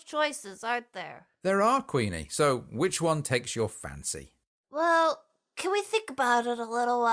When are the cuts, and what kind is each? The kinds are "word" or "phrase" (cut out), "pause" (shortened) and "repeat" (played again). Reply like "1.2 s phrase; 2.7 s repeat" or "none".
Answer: none